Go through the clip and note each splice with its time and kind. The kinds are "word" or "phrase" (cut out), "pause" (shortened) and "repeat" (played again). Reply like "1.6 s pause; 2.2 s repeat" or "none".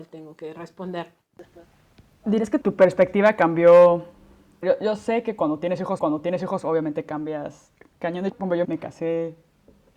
2.6 s word; 4.6 s phrase; 6.0 s repeat; 8.3 s word; 8.6 s word